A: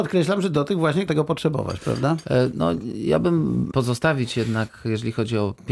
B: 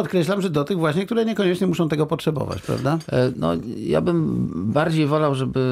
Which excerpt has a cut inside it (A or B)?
A